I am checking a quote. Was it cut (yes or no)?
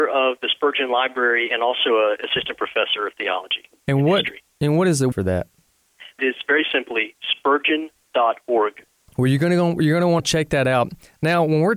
yes